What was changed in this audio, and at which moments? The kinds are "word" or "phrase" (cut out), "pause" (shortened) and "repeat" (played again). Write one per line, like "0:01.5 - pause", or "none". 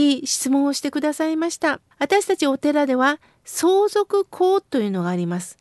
0:01.9 - pause

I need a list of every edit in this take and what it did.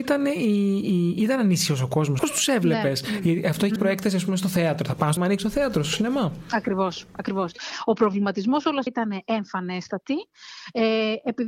0:02.2 - word
0:03.8 - word
0:05.2 - word
0:08.9 - phrase

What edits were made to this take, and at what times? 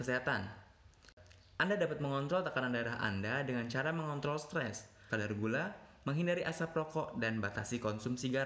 0:05.1 - word

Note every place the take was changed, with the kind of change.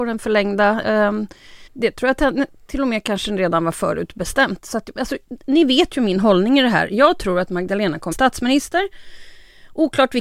0:01.7 - pause
0:08.1 - phrase

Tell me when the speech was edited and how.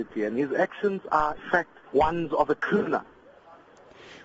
0:01.4 - word
0:01.9 - pause

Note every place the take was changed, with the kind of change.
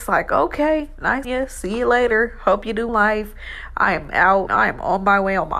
0:01.2 - word
0:02.9 - word
0:04.5 - word

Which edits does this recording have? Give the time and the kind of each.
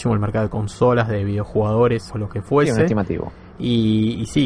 0:02.1 - word

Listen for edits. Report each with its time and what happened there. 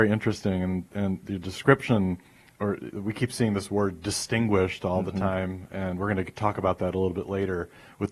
none

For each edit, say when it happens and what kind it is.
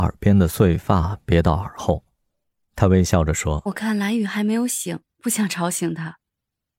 none

